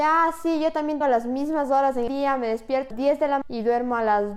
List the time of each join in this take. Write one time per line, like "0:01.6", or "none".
0:01.0
0:02.1
0:02.9
0:03.4

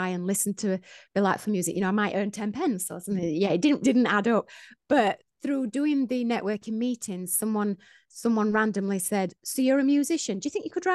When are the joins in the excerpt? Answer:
0:03.8

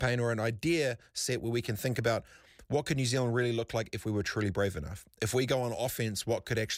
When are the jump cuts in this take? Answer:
none

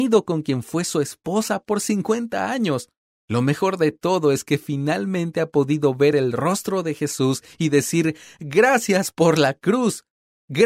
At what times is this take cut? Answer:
none

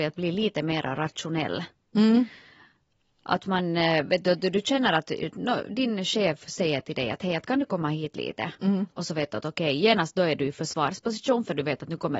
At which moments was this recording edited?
none

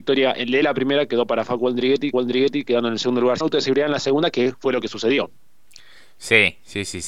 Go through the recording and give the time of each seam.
0:02.1
0:03.4

